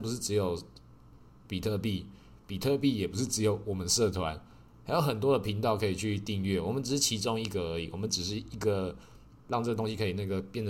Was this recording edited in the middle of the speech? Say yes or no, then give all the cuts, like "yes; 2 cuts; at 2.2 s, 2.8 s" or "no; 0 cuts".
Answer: yes; 1 cut; at 9.4 s